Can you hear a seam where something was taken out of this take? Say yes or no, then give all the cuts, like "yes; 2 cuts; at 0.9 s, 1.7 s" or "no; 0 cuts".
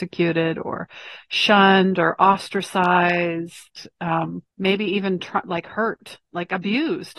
yes; 2 cuts; at 4.5 s, 6.2 s